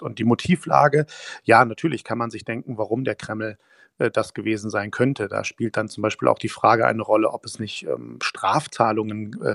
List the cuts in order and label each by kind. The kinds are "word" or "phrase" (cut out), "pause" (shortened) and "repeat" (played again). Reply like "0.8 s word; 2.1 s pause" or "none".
none